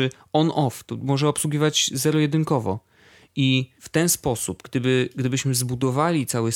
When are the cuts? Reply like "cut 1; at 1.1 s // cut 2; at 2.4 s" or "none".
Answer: cut 1; at 3.8 s